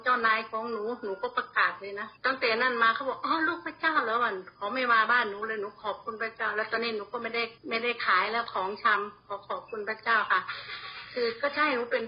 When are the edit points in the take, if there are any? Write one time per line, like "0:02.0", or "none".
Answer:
0:02.2
0:07.6